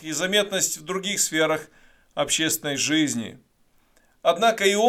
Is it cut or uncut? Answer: uncut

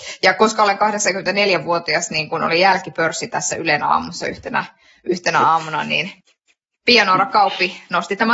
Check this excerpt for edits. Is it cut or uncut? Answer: uncut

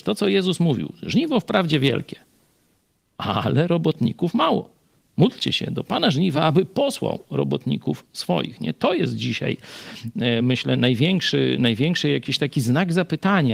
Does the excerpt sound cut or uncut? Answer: uncut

